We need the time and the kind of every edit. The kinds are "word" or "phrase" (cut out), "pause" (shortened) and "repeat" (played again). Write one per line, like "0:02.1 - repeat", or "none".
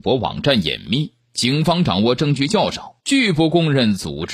0:03.0 - pause